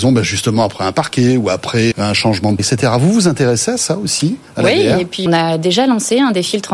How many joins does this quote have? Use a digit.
3